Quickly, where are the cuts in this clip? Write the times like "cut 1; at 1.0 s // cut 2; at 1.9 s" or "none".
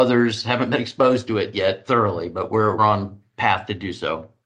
cut 1; at 2.8 s

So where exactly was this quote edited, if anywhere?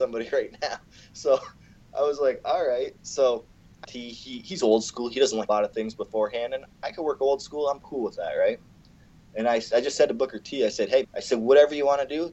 cut 1; at 3.8 s // cut 2; at 5.5 s // cut 3; at 11.0 s

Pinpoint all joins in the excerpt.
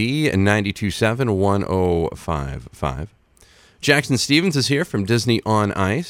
none

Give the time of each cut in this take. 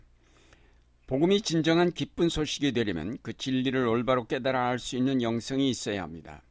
none

